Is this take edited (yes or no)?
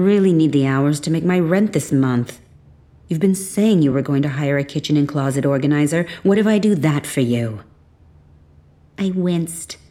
no